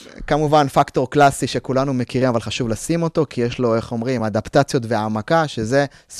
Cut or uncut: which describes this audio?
uncut